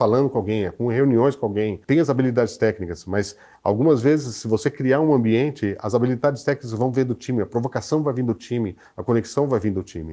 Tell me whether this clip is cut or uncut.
uncut